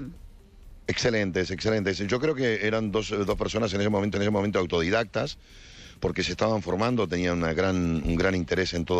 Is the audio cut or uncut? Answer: cut